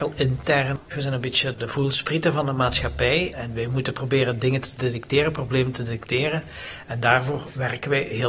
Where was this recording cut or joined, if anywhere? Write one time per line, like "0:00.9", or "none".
0:01.5
0:03.3